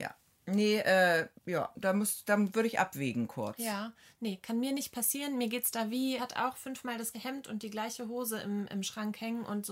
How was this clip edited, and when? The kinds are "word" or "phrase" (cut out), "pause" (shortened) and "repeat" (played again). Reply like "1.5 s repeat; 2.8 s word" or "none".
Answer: 1.4 s pause; 6.2 s phrase; 7.1 s word